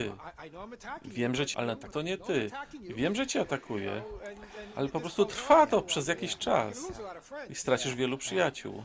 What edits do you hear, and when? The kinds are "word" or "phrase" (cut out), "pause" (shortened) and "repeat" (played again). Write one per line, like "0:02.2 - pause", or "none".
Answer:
0:01.5 - word
0:01.9 - word